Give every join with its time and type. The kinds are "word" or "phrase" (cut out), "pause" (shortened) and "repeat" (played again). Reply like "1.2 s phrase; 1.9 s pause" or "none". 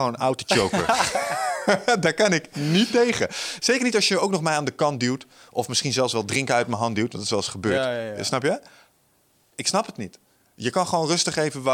none

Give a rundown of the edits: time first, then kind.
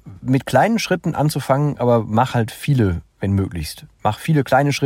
none

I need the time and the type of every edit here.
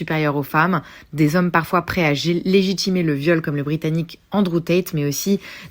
none

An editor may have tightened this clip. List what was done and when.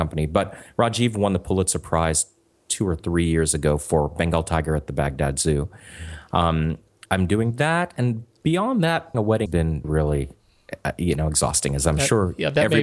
7.1 s word; 9.1 s word; 9.5 s word; 9.8 s word

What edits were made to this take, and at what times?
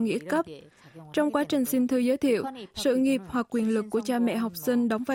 none

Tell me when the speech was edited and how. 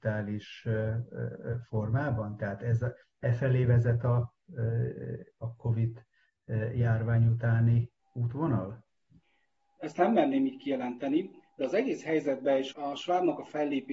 8.0 s pause; 12.7 s word

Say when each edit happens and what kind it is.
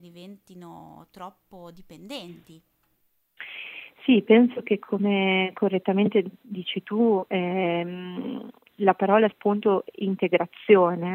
9.3 s word

